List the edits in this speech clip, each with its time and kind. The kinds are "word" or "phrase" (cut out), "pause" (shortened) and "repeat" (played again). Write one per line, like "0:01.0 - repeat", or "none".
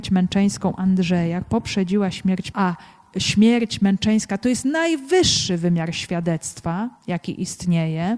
0:01.4 - word
0:02.5 - word
0:07.0 - pause